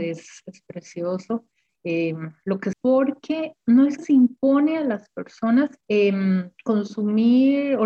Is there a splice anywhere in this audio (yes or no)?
yes